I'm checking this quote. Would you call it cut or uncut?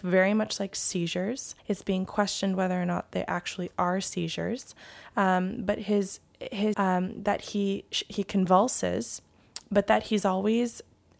cut